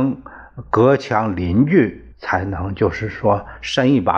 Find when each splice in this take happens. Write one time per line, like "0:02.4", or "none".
0:02.1